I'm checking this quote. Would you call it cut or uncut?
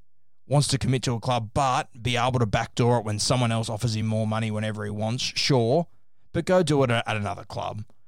uncut